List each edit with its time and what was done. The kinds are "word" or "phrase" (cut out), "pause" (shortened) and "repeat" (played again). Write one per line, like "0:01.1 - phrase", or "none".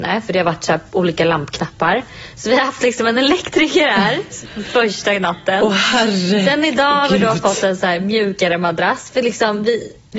none